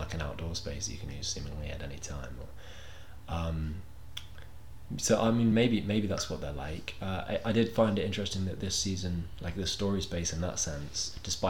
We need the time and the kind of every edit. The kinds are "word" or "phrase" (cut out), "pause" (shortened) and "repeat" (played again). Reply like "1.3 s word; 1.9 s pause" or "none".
none